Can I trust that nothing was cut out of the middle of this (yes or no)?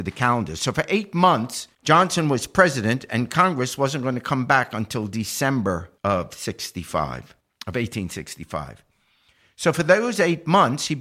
no